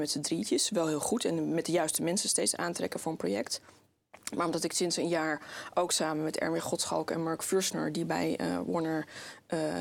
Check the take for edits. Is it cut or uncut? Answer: uncut